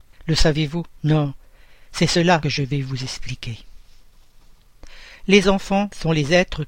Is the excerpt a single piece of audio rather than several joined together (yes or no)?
yes